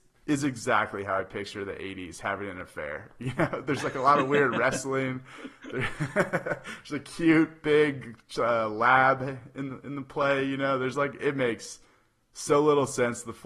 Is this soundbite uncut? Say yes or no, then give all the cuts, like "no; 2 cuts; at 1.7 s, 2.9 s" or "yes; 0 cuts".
yes; 0 cuts